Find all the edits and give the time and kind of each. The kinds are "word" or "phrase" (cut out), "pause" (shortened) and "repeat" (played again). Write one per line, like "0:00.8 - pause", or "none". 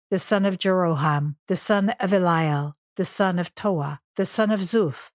0:01.4 - pause
0:02.8 - pause
0:04.0 - pause